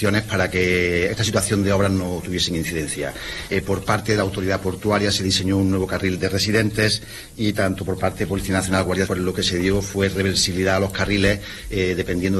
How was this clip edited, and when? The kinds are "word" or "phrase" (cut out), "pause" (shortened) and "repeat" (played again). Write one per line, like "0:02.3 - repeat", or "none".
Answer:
0:01.1 - word
0:06.2 - word
0:09.1 - word